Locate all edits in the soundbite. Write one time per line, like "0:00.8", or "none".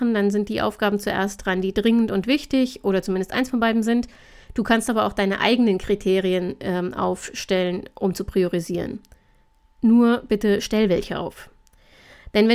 none